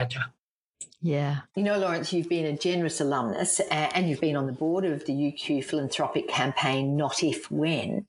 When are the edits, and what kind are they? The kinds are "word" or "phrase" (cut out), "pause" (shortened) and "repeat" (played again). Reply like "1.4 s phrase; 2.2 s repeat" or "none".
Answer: 1.5 s pause